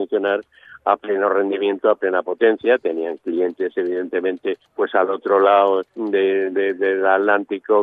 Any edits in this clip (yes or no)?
yes